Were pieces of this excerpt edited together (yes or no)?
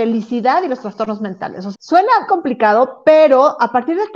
yes